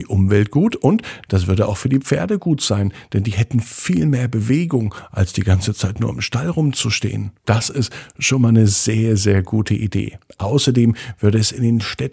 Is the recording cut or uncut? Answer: cut